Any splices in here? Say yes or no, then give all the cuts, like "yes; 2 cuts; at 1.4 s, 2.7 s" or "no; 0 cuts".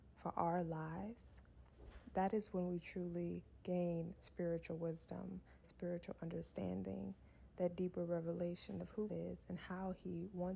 yes; 3 cuts; at 4.2 s, 5.6 s, 9.1 s